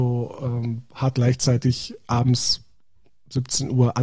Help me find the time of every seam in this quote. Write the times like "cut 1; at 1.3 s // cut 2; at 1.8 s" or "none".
cut 1; at 1.1 s